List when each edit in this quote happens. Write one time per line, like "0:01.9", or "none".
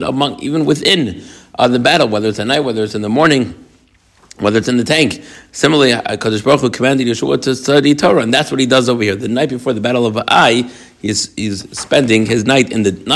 none